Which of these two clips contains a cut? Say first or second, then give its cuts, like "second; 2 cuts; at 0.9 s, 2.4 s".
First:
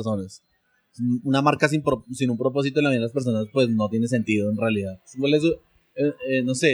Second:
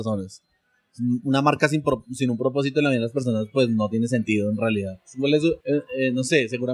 second; 1 cut; at 5.6 s